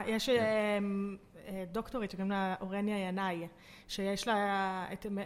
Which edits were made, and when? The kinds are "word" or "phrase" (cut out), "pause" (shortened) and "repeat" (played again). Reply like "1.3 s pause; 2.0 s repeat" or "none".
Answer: none

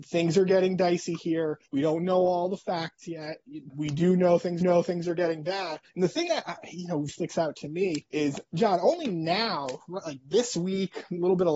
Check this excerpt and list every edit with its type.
1.7 s pause; 3.7 s word; 4.6 s repeat; 5.9 s pause; 7.1 s word; 8.1 s pause

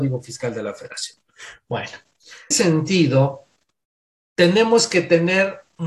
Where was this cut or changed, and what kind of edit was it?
2.5 s phrase

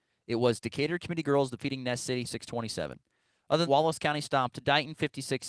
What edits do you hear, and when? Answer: 2.2 s word; 3.6 s phrase

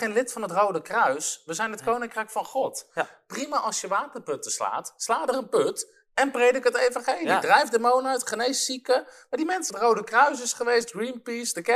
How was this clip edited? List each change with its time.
9.7 s phrase

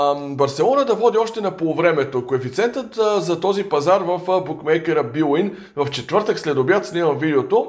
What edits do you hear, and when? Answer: none

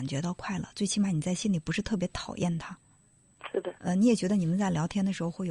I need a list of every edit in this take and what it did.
3.8 s word

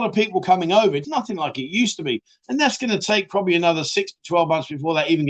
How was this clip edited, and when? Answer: 1.0 s word

